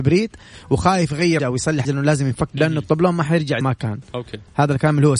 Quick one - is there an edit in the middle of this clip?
yes; 4 cuts; at 1.4 s, 1.8 s, 2.5 s, 3.6 s

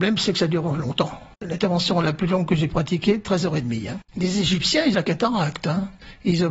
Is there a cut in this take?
yes; 4 cuts; at 1.3 s, 2.7 s, 4.1 s, 4.9 s

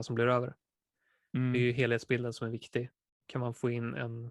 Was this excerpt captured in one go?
yes; 0 cuts

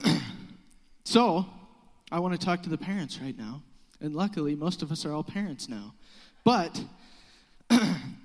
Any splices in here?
no; 0 cuts

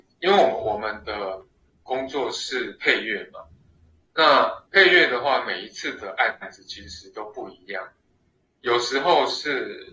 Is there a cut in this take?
yes; 2 cuts; at 1.7 s, 4.7 s

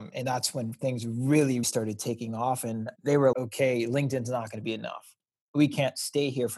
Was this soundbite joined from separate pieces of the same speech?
yes; 3 cuts; at 1.6 s, 3.0 s, 3.3 s

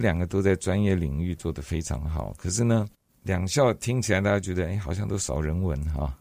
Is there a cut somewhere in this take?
yes; 1 cut; at 3.1 s

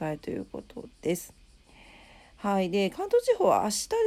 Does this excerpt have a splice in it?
no; 0 cuts

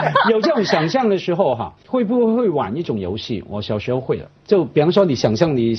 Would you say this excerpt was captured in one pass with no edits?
no; 1 cut; at 1.8 s

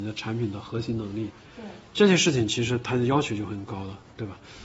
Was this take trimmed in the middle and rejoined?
no; 0 cuts

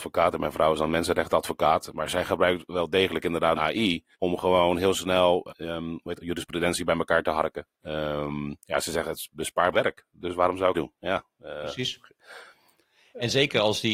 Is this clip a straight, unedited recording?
no; 7 cuts; at 3.6 s, 4.1 s, 5.5 s, 6.2 s, 7.7 s, 9.7 s, 10.7 s

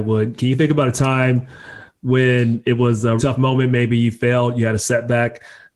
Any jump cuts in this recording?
yes; 1 cut; at 3.2 s

